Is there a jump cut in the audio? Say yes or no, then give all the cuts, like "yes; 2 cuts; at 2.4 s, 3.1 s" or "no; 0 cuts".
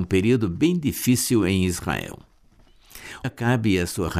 yes; 1 cut; at 3.2 s